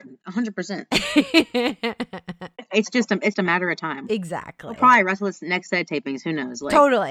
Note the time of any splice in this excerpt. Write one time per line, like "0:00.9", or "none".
0:03.3

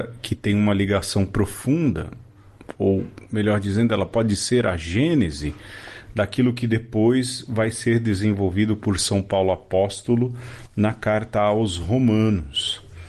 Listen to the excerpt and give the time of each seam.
none

